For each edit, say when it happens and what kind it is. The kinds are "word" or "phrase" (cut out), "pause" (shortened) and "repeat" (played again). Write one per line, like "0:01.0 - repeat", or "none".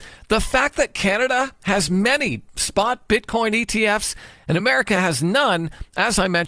none